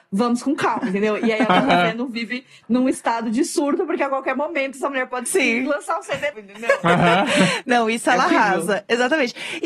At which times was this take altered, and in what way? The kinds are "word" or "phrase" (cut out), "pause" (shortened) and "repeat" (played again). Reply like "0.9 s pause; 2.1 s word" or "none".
5.3 s word; 6.3 s word